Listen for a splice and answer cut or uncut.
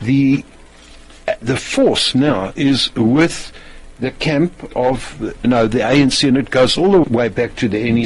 cut